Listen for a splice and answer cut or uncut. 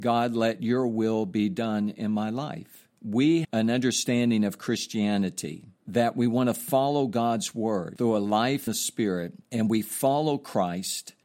cut